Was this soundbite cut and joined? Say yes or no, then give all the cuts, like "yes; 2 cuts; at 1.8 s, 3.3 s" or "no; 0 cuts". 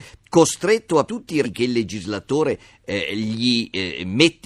yes; 2 cuts; at 1.1 s, 1.4 s